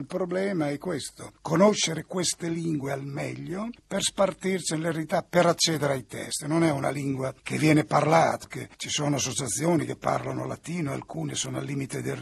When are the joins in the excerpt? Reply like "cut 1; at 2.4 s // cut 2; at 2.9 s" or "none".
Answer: cut 1; at 8.4 s // cut 2; at 8.7 s

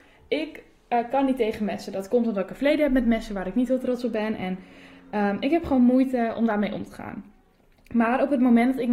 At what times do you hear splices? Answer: none

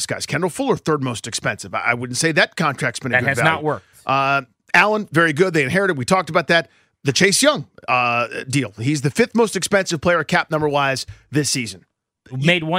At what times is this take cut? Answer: none

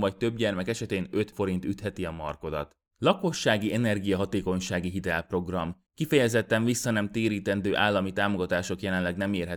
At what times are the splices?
cut 1; at 1.3 s // cut 2; at 2.9 s // cut 3; at 5.9 s

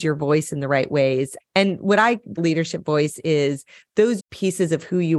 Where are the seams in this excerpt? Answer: cut 1; at 1.4 s // cut 2; at 2.4 s // cut 3; at 4.2 s

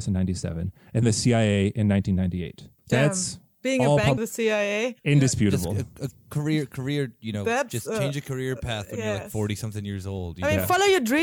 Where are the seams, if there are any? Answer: cut 1; at 1.0 s // cut 2; at 2.8 s // cut 3; at 4.2 s // cut 4; at 5.0 s

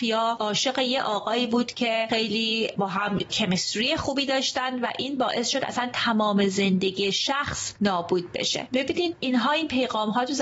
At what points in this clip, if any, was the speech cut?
none

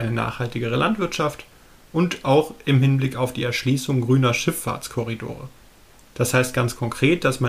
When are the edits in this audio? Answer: none

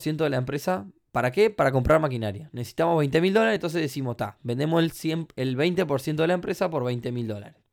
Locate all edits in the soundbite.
none

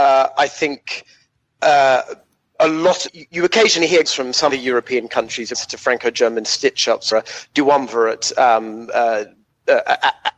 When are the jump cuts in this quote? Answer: cut 1; at 2.5 s // cut 2; at 3.1 s // cut 3; at 4.1 s // cut 4; at 4.5 s // cut 5; at 5.5 s // cut 6; at 7.1 s

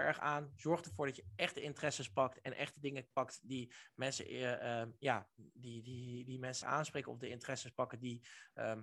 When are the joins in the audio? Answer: cut 1; at 6.6 s

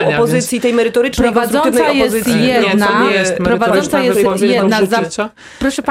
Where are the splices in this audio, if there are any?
none

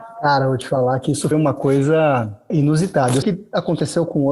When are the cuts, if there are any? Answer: cut 1; at 1.3 s // cut 2; at 2.5 s // cut 3; at 3.2 s

